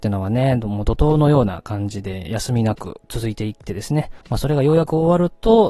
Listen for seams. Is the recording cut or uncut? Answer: cut